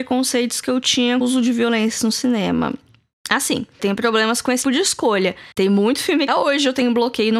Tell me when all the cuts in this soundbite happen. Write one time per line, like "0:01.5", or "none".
0:01.2
0:03.8
0:04.6
0:05.5
0:06.3